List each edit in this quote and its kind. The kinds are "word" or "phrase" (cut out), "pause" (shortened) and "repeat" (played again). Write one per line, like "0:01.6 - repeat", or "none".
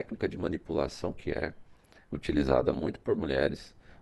none